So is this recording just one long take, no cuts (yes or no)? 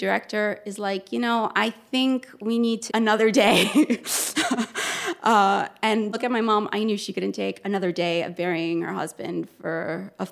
no